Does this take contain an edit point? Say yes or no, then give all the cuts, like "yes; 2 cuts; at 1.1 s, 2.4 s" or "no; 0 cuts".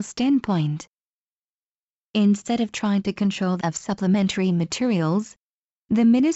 yes; 1 cut; at 3.6 s